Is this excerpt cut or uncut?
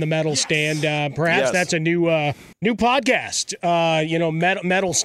cut